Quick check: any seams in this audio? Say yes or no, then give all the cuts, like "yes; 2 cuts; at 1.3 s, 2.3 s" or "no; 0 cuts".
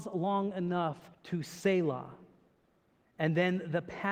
yes; 1 cut; at 1.1 s